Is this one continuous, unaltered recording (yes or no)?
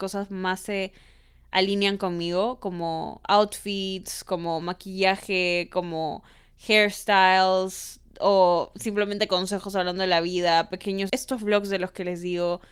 no